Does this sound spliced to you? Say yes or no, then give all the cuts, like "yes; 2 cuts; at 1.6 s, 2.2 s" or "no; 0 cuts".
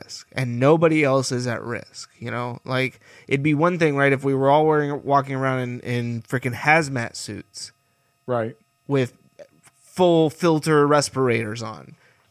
no; 0 cuts